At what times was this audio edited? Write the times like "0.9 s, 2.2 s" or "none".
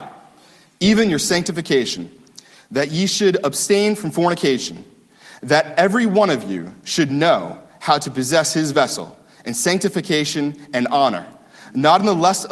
none

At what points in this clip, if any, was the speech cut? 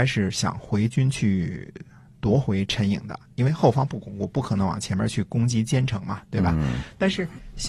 none

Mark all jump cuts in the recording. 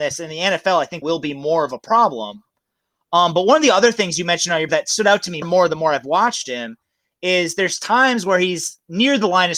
1.0 s, 4.7 s, 5.4 s

